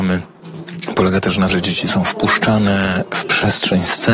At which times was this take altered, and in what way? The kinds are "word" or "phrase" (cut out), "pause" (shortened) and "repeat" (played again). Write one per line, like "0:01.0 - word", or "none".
0:01.5 - word